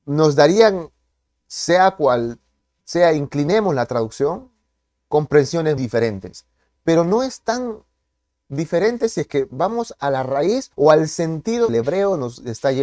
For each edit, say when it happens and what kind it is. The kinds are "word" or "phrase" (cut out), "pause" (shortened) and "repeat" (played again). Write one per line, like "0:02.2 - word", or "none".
0:05.8 - word
0:10.7 - pause
0:11.7 - phrase